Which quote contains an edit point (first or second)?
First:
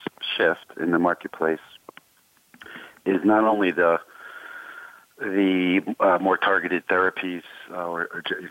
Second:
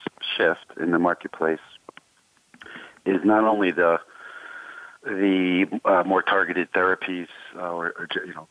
second